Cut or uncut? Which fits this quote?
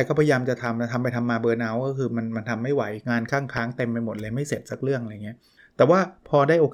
cut